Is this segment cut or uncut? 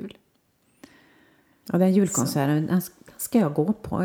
uncut